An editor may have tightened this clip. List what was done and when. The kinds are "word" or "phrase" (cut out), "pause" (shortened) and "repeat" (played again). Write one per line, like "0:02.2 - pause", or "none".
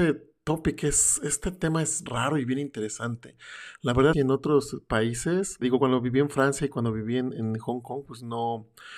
0:02.1 - phrase
0:04.1 - phrase
0:05.6 - word